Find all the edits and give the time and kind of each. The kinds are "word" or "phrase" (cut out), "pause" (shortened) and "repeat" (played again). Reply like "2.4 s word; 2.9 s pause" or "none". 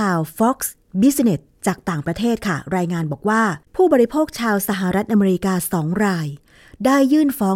3.6 s pause